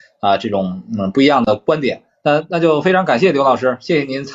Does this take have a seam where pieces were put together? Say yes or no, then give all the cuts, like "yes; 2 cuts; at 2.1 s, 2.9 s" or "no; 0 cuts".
no; 0 cuts